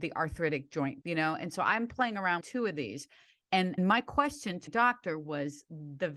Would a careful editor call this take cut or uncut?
cut